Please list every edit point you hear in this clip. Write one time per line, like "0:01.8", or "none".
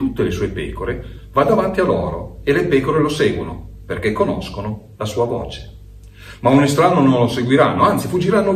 none